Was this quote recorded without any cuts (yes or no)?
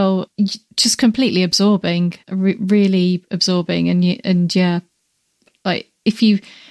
no